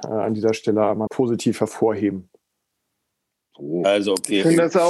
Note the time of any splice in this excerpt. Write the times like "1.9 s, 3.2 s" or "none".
1.1 s